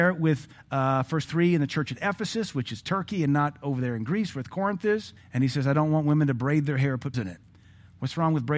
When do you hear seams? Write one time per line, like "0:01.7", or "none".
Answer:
0:01.2
0:05.2
0:07.1